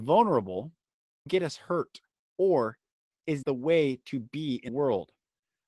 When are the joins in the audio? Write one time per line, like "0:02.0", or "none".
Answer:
0:01.3
0:03.4
0:04.7